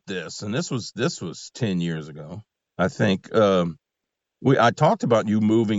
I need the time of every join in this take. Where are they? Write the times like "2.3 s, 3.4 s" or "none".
2.5 s